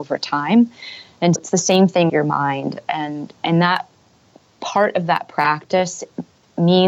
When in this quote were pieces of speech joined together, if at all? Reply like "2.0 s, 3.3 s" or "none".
1.4 s, 2.1 s